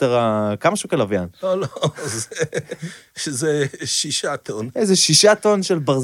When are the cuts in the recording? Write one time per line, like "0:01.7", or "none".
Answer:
none